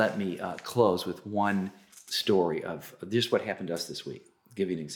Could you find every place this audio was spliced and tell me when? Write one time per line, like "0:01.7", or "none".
none